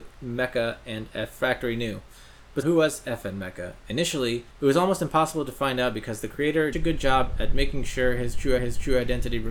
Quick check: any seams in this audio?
yes; 4 cuts; at 2.6 s, 4.5 s, 6.7 s, 8.6 s

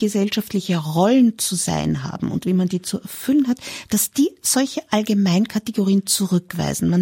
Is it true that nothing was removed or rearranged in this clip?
yes; 0 cuts

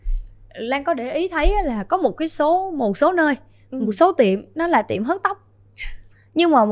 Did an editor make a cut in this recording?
no; 0 cuts

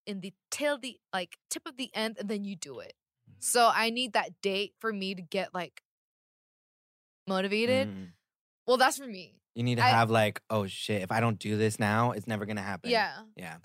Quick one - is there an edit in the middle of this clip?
yes; 1 cut; at 1.4 s

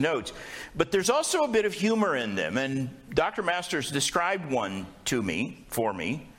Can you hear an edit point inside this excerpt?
no; 0 cuts

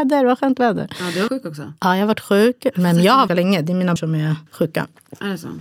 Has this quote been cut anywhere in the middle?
yes; 5 cuts; at 1.3 s, 1.8 s, 3.3 s, 4.0 s, 4.5 s

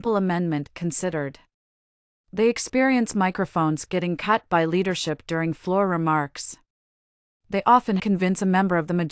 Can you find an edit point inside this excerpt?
yes; 1 cut; at 8.0 s

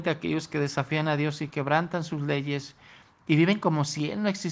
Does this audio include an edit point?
no; 0 cuts

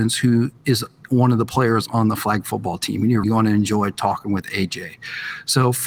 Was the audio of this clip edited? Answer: yes; 1 cut; at 3.2 s

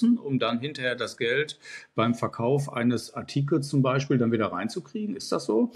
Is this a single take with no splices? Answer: yes; 0 cuts

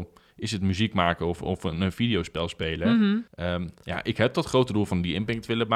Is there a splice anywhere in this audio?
yes; 1 cut; at 3.3 s

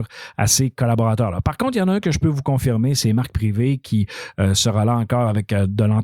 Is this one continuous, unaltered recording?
yes; 0 cuts

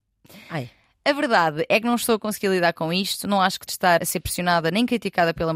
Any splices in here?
yes; 2 cuts; at 3.7 s, 4.0 s

